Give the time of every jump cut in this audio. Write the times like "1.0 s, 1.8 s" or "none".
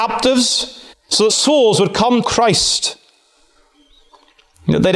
0.9 s, 1.3 s, 2.2 s